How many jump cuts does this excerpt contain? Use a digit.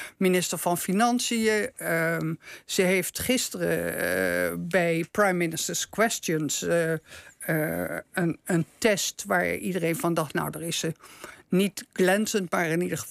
0